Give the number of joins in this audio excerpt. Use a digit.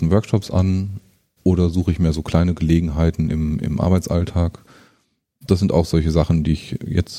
0